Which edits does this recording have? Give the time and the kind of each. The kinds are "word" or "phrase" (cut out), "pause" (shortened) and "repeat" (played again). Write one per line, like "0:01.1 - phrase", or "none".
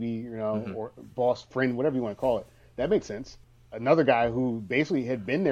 none